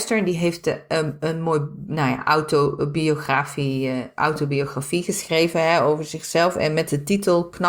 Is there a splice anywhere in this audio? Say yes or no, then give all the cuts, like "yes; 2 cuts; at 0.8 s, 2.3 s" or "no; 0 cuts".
no; 0 cuts